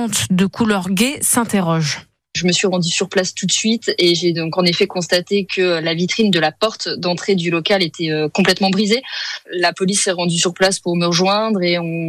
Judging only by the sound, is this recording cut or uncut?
uncut